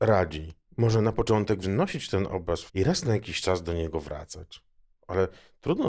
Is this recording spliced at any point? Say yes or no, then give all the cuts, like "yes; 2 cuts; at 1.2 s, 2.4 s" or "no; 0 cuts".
yes; 2 cuts; at 1.6 s, 2.7 s